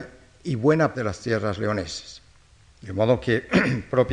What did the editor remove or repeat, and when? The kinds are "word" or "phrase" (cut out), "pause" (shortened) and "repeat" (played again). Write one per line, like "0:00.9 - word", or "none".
0:00.9 - word